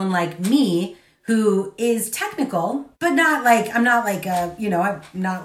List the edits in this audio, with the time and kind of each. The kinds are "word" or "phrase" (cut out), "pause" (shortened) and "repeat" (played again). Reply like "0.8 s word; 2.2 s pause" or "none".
2.9 s pause